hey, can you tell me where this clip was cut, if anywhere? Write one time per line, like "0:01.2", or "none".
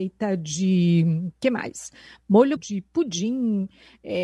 0:02.6

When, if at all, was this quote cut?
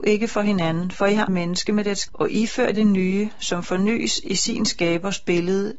0:01.3
0:02.1
0:02.7

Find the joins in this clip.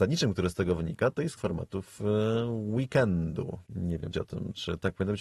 0:01.4
0:03.7
0:04.1

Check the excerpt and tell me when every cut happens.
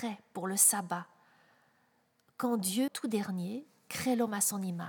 0:02.9

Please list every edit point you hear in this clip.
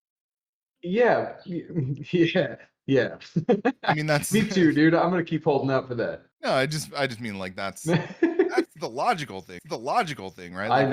0:06.3
0:09.6

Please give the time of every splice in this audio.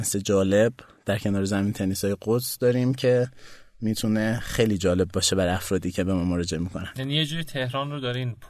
none

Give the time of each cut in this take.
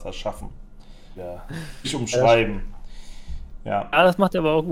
0:01.2
0:01.8

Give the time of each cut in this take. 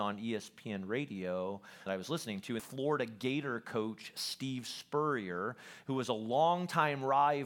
0:01.9
0:02.6

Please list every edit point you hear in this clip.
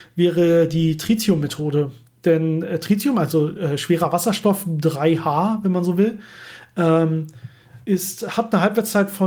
0:07.8

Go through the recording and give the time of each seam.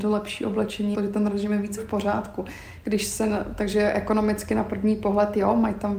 0:00.9
0:01.8

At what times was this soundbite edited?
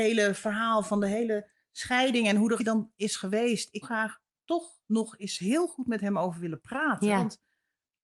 0:02.6
0:03.8
0:04.8

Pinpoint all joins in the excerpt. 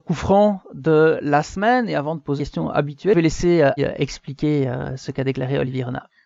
0:02.4
0:03.8

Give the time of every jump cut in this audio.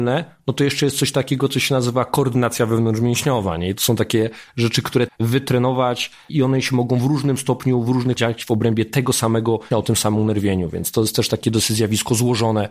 0:05.1
0:08.2
0:09.7

